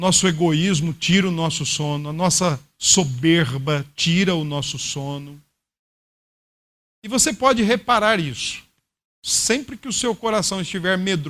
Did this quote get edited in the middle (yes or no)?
no